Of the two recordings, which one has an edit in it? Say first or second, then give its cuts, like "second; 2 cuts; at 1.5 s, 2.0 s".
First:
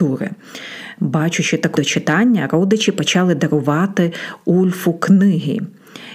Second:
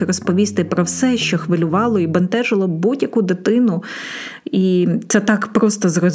first; 1 cut; at 1.7 s